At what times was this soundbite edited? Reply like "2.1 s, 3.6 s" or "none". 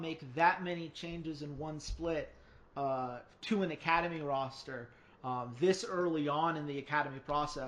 none